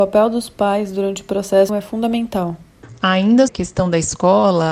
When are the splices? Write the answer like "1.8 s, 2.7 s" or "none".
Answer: 1.7 s, 3.5 s